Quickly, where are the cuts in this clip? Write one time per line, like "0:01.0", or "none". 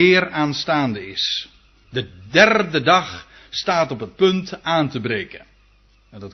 none